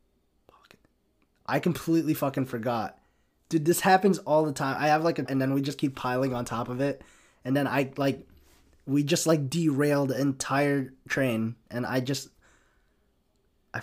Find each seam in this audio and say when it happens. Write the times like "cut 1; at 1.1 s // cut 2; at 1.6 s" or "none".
cut 1; at 5.3 s